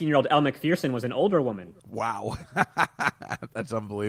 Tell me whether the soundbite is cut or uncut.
cut